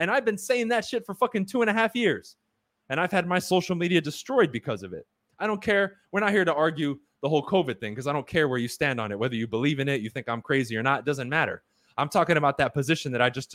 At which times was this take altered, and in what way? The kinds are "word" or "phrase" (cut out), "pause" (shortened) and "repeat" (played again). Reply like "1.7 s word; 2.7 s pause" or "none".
none